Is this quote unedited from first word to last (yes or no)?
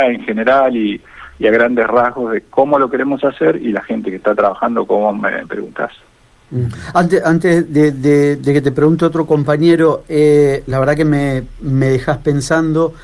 yes